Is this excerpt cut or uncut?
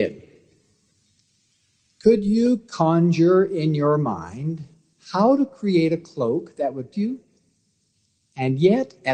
cut